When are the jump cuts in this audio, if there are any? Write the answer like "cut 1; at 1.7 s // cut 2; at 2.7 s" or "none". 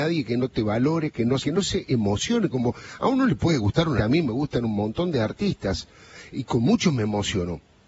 cut 1; at 1.4 s // cut 2; at 4.0 s